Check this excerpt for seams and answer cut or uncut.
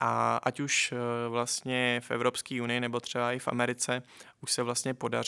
uncut